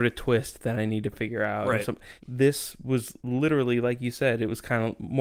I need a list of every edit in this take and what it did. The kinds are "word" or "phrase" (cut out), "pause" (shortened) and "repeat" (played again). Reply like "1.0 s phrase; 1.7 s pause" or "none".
2.2 s pause; 3.2 s pause